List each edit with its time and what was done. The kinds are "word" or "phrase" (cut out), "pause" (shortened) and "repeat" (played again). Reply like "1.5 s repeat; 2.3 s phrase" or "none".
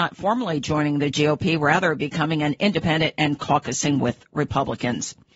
none